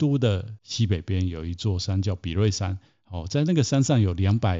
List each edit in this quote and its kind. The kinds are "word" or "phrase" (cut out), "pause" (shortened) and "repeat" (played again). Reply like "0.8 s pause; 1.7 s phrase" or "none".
none

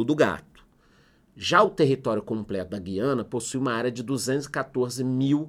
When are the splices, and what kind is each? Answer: none

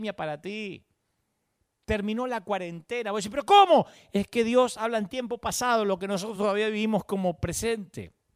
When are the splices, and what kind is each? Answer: none

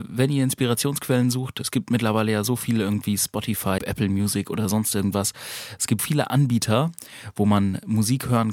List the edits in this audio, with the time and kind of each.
3.8 s word; 6.0 s word

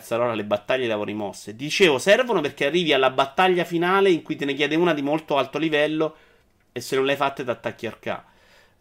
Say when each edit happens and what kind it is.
none

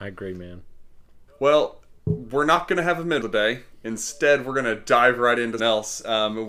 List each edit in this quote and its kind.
1.3 s pause; 3.2 s word; 5.6 s word

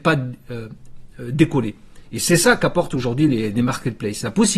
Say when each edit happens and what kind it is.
none

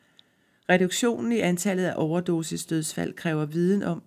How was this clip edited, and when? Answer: none

